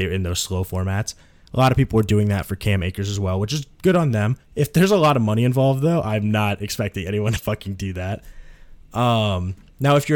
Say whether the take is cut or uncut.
uncut